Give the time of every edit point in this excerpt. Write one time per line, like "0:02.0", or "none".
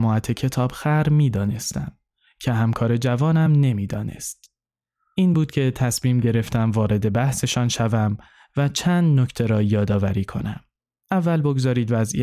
none

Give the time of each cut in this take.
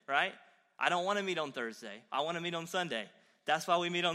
none

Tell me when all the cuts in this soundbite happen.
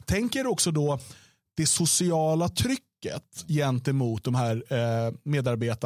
none

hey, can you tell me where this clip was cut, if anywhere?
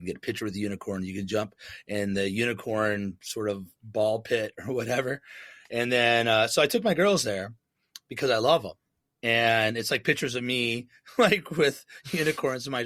none

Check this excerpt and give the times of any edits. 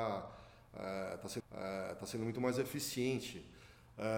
0:01.4

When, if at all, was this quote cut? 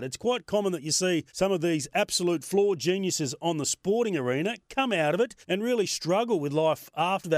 0:01.3
0:05.4

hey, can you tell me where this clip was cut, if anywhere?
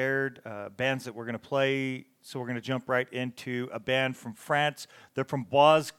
none

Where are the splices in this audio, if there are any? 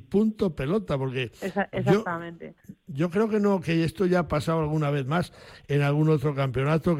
0:02.6

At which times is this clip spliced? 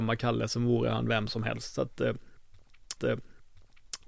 0:03.0

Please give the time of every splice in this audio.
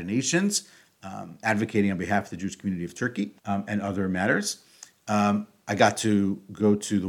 0:03.4

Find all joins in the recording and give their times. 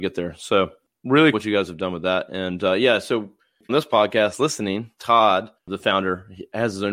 0:01.3
0:03.7
0:05.6

